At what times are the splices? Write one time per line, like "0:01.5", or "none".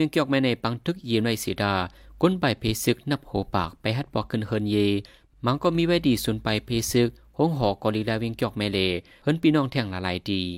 none